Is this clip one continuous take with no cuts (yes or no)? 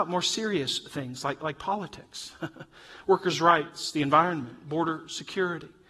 yes